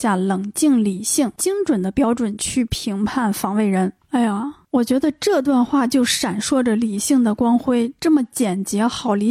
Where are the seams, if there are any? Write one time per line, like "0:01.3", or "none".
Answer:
0:01.4